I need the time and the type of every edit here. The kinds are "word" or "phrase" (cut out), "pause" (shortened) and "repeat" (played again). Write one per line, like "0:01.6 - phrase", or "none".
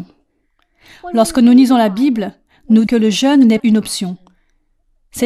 0:02.9 - word
0:03.6 - word